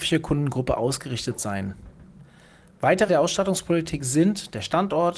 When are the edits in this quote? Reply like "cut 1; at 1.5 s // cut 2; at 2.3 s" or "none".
cut 1; at 3.1 s